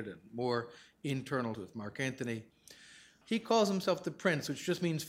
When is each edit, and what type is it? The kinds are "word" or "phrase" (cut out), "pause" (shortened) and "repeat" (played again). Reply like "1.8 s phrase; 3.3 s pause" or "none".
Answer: 1.5 s word; 3.2 s word